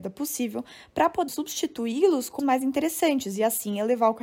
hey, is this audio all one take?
no; 2 cuts; at 1.3 s, 2.4 s

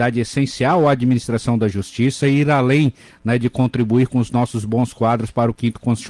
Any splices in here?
no; 0 cuts

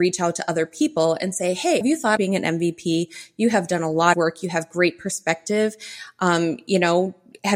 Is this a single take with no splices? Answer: no; 3 cuts; at 1.8 s, 2.2 s, 4.1 s

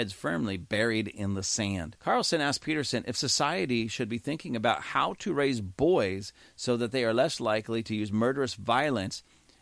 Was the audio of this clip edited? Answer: no; 0 cuts

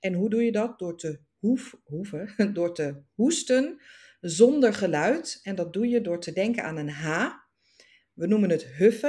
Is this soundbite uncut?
yes; 0 cuts

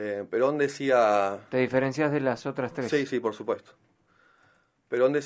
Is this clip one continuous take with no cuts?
yes; 0 cuts

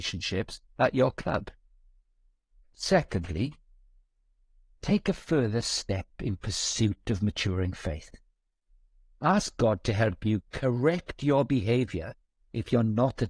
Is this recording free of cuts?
yes; 0 cuts

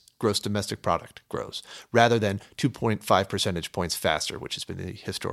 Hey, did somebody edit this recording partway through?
no; 0 cuts

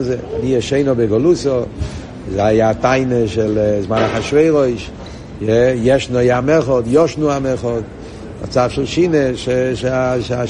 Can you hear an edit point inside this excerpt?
no; 0 cuts

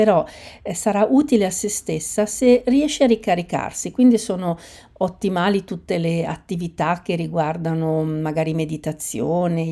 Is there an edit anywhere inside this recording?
no; 0 cuts

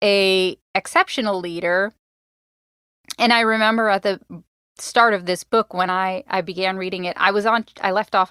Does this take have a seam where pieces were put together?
no; 0 cuts

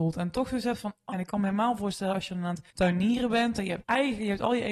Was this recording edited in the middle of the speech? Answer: yes; 3 cuts; at 1.1 s, 2.7 s, 3.8 s

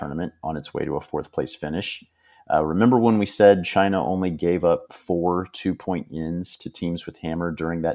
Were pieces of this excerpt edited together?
no; 0 cuts

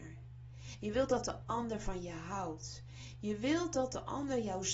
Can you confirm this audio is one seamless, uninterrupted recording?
yes; 0 cuts

